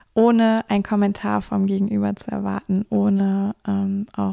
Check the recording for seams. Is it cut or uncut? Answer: uncut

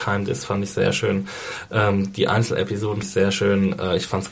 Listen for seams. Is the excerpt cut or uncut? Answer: cut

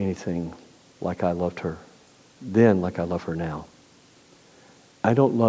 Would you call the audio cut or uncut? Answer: uncut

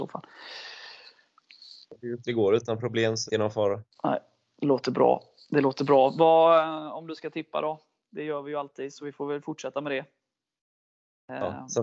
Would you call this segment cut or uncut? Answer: cut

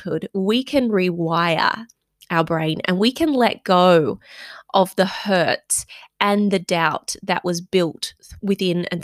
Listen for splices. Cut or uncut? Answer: uncut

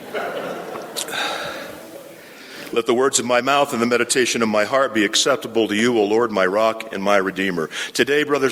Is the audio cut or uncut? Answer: uncut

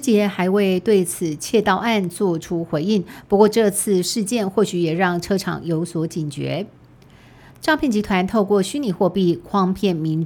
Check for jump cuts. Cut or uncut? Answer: uncut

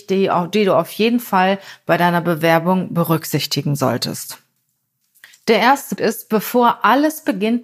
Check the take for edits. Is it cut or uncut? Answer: cut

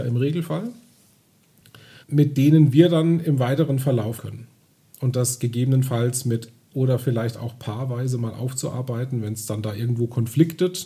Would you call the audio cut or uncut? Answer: cut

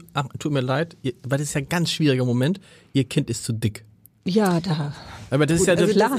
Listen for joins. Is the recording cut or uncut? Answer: uncut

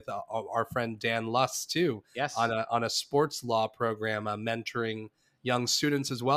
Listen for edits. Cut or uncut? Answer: uncut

